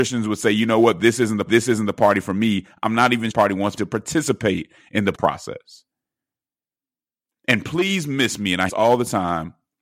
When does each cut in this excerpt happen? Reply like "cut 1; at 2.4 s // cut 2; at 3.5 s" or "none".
cut 1; at 1.5 s // cut 2; at 3.3 s // cut 3; at 3.8 s // cut 4; at 5.1 s // cut 5; at 8.7 s